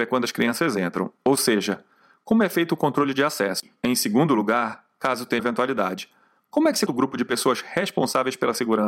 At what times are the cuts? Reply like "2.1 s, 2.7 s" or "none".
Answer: 5.4 s, 6.9 s